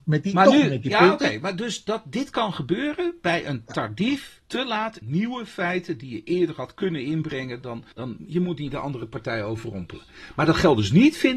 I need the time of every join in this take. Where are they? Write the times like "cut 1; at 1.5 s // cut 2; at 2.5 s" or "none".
cut 1; at 4.5 s // cut 2; at 5.0 s // cut 3; at 7.9 s